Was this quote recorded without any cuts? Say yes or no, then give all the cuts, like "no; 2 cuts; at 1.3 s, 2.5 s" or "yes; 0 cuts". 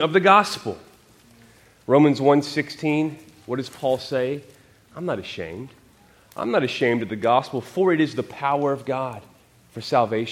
yes; 0 cuts